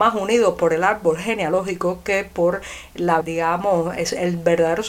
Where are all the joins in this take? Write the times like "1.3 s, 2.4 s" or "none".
3.2 s